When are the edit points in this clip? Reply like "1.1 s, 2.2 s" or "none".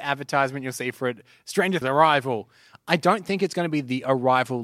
1.8 s